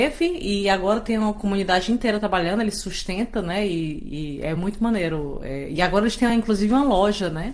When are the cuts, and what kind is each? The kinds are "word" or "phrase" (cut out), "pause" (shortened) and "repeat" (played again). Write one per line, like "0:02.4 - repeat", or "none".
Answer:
none